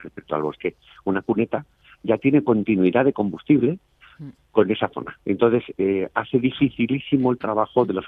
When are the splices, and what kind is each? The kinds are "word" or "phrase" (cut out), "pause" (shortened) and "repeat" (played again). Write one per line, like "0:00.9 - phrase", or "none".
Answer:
none

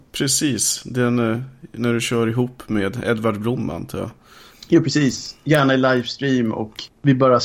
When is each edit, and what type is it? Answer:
none

